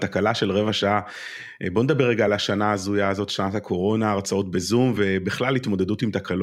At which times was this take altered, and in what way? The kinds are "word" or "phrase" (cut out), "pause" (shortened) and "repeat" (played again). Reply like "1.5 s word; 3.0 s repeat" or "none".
none